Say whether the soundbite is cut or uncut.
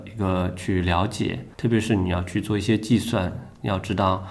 cut